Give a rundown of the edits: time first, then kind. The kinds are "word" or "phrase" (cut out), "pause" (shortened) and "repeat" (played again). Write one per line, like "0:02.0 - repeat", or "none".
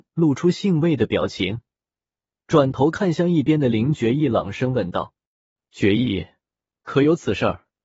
none